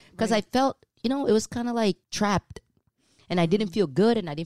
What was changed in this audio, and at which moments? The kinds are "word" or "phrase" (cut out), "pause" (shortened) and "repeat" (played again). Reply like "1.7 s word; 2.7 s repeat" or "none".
2.0 s pause